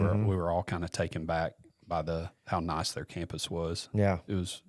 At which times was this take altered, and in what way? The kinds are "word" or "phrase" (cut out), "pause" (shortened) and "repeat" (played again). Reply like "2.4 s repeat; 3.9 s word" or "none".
2.4 s pause